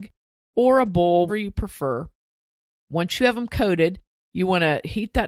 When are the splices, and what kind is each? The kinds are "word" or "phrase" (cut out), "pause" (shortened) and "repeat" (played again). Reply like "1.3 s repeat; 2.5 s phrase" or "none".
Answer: 1.3 s word

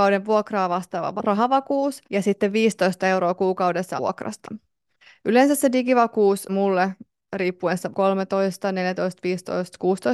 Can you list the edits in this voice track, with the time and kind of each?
1.2 s word; 2.0 s pause; 4.0 s word; 6.5 s word; 7.9 s phrase

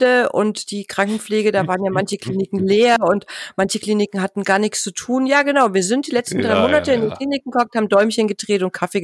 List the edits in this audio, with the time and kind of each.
none

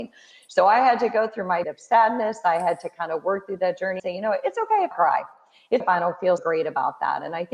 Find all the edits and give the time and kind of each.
1.6 s word; 4.0 s word; 4.9 s word; 5.8 s word; 6.4 s word

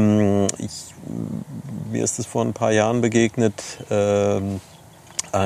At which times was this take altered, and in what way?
none

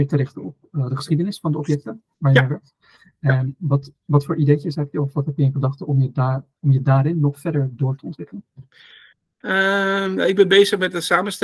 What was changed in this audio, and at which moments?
none

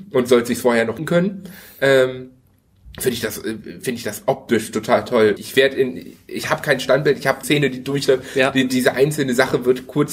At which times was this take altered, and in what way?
1.0 s phrase; 5.4 s word; 7.4 s word

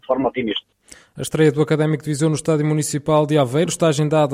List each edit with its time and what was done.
none

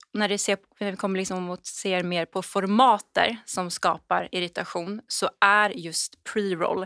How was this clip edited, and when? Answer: none

